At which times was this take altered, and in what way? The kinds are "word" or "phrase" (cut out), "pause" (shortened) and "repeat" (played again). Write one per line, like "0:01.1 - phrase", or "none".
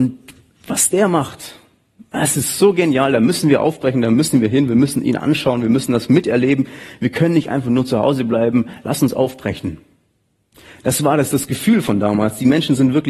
none